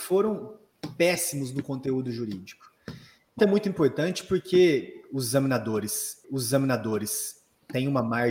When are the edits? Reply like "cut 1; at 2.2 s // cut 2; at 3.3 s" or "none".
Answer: cut 1; at 3.4 s // cut 2; at 6.2 s